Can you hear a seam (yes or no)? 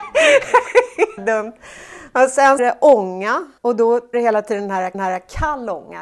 yes